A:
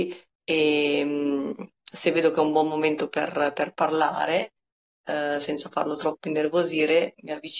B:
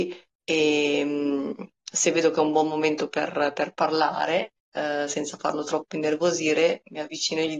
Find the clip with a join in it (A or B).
B